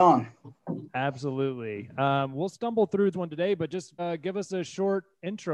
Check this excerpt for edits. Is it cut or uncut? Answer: cut